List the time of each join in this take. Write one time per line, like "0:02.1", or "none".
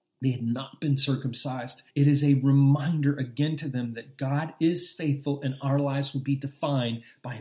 0:01.9